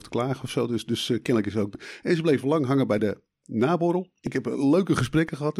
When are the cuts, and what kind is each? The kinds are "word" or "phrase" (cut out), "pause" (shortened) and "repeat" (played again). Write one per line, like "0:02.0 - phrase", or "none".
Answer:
none